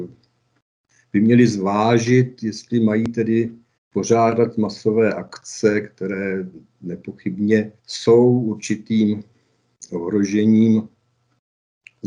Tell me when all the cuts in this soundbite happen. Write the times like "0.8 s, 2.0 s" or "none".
3.8 s, 7.8 s